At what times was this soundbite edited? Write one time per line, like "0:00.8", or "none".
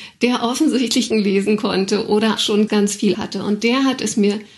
0:01.1
0:02.4
0:02.7
0:03.1